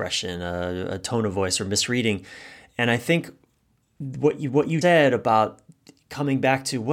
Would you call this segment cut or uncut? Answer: cut